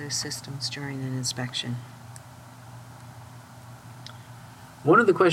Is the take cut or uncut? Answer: uncut